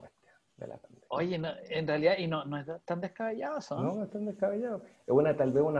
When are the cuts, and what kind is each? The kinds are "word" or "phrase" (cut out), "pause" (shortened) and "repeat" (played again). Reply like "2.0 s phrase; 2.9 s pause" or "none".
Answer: 1.0 s pause